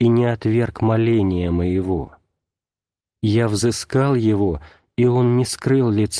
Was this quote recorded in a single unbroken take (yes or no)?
yes